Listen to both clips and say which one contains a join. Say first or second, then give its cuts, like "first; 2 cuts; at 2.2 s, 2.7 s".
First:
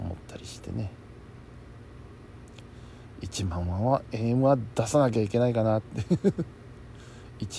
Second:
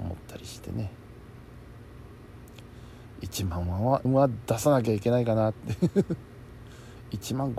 second; 1 cut; at 4.0 s